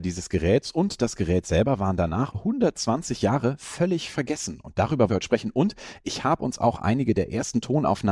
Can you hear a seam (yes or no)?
yes